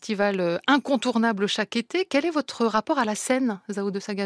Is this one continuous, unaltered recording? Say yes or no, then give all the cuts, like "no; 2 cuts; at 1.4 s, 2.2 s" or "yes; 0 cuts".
yes; 0 cuts